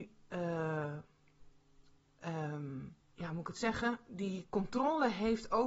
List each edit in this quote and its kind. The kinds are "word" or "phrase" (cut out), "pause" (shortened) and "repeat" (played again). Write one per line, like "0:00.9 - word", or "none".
0:03.0 - pause